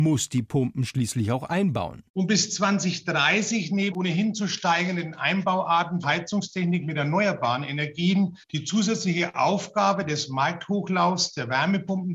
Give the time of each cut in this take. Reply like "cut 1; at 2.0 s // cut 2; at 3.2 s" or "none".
cut 1; at 3.9 s // cut 2; at 6.0 s // cut 3; at 8.4 s